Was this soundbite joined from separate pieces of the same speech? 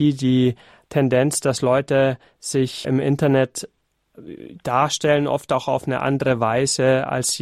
yes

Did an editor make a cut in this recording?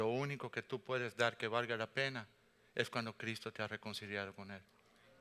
no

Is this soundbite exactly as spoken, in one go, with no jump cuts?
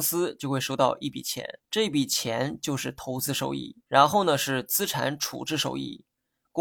no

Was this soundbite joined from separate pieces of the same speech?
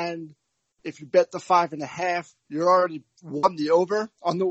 no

